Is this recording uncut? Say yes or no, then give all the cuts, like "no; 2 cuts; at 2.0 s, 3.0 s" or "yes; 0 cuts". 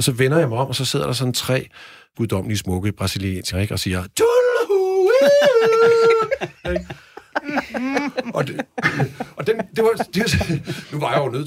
no; 2 cuts; at 2.1 s, 3.5 s